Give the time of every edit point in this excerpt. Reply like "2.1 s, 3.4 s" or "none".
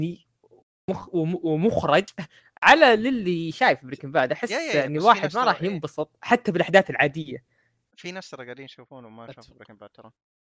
none